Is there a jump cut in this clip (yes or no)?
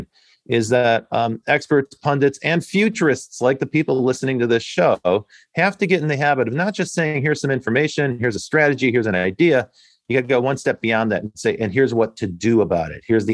no